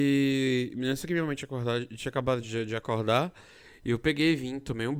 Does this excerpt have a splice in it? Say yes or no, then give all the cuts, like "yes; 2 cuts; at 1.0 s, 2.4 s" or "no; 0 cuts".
no; 0 cuts